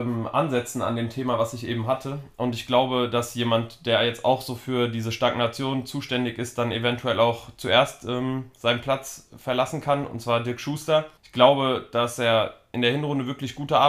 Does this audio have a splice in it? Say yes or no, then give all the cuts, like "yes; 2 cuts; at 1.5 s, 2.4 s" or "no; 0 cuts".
yes; 1 cut; at 11.2 s